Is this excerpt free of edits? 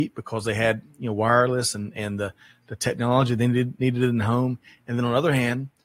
yes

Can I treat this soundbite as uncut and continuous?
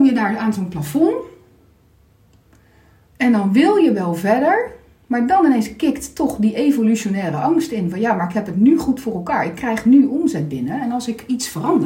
yes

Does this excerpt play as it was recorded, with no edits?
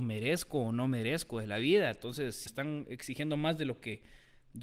no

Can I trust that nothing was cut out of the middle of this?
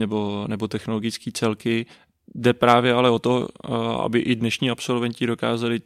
yes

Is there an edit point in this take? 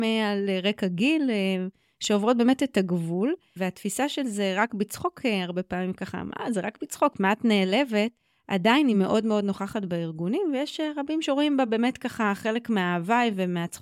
no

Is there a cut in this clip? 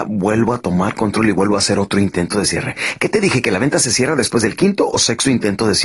no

